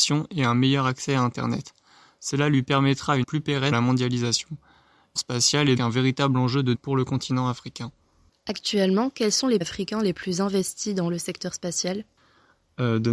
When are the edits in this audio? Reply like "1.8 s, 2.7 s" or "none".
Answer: 3.2 s, 3.7 s, 5.2 s, 5.8 s, 6.7 s, 9.6 s

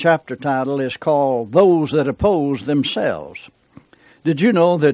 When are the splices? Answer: none

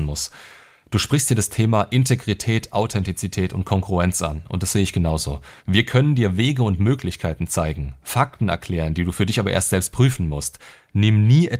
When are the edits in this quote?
5.6 s

